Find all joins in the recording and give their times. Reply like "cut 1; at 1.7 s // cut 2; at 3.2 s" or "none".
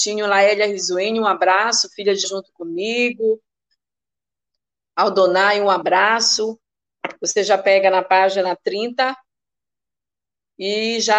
cut 1; at 2.2 s